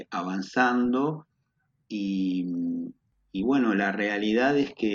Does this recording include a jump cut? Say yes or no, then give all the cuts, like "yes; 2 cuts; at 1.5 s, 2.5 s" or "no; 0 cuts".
no; 0 cuts